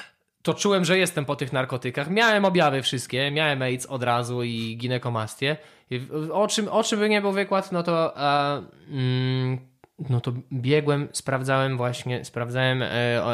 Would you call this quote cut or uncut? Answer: uncut